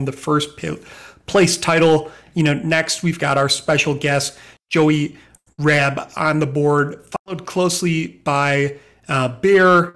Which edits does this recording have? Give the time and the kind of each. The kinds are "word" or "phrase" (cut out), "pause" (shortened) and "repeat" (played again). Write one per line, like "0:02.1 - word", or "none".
none